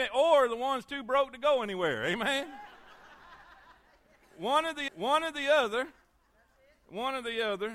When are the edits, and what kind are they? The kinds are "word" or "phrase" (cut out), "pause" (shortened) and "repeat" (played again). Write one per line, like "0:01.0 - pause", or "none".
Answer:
0:04.9 - repeat